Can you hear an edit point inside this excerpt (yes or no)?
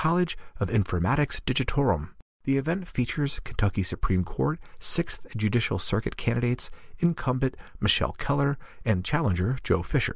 no